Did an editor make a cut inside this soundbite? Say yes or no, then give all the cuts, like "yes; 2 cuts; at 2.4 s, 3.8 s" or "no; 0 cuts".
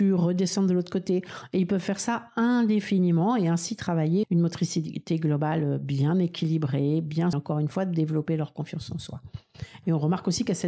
yes; 2 cuts; at 4.2 s, 7.3 s